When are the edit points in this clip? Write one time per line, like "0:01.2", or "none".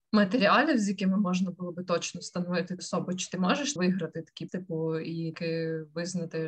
0:02.8
0:03.8
0:04.5
0:05.3